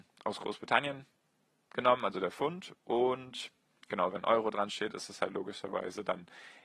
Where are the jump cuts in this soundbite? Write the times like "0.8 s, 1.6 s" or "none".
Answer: none